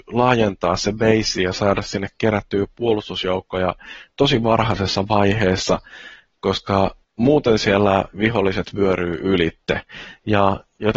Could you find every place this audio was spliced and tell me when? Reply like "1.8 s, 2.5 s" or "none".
7.0 s